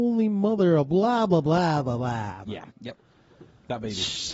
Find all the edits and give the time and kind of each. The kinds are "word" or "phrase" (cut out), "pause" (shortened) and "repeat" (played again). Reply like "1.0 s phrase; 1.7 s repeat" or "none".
2.7 s pause